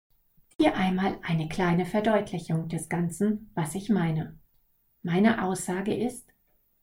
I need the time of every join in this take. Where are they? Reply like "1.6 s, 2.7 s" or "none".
none

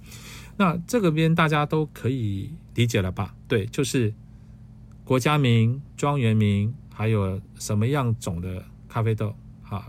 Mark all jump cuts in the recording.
5.9 s

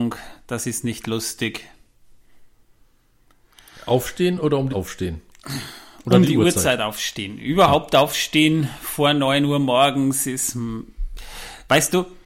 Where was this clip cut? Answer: 4.7 s

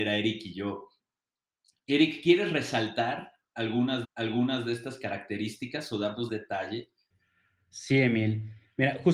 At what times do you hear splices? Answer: 4.0 s, 6.3 s

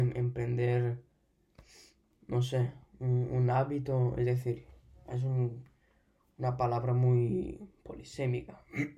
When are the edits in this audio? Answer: none

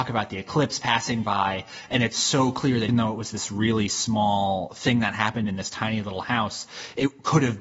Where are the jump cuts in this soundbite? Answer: 2.9 s

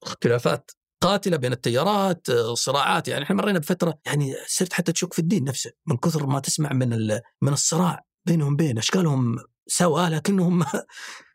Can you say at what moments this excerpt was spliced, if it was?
4.0 s, 7.3 s, 9.6 s

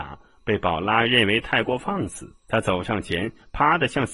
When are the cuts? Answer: 2.4 s

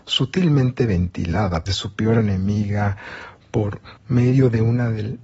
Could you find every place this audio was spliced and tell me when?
1.7 s, 4.0 s

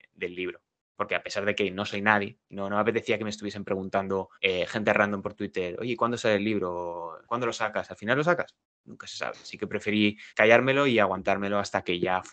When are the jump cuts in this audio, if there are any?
4.3 s, 7.2 s, 8.6 s, 10.3 s

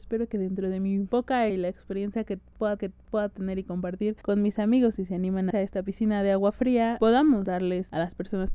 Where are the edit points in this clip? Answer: 1.5 s, 2.8 s, 5.5 s

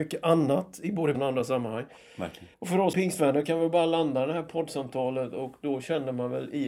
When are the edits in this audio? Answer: 1.1 s, 2.5 s, 2.9 s

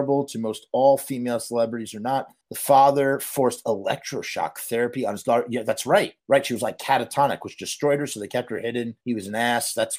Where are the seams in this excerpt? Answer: 2.4 s, 6.2 s, 9.0 s

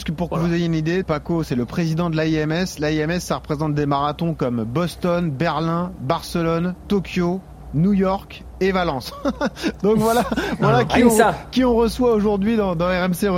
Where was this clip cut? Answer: 1.0 s

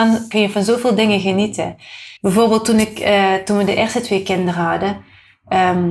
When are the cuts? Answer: 2.2 s

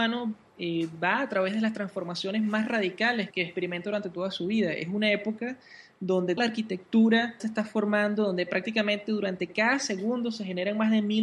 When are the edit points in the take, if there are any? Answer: 3.3 s, 6.4 s, 7.4 s

